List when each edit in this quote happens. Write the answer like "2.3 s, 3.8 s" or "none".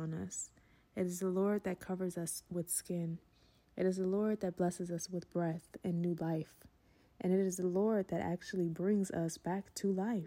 none